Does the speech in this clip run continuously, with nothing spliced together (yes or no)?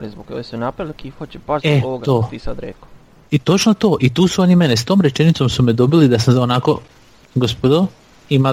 yes